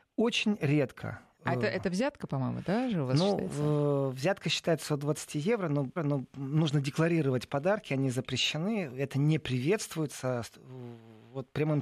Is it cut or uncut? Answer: cut